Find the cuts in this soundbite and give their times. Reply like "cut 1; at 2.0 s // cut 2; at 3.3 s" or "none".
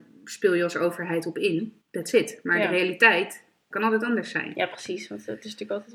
cut 1; at 1.8 s // cut 2; at 3.7 s